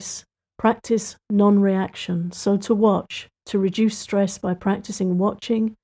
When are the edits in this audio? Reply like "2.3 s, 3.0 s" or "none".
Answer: 3.4 s